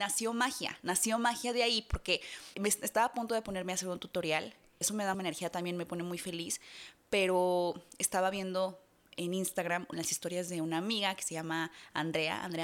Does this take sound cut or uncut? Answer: cut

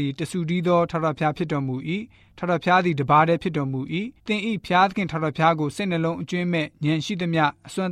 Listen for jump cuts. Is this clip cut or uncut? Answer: cut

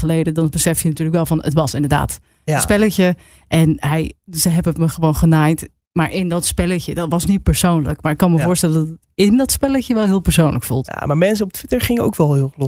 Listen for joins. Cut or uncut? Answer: uncut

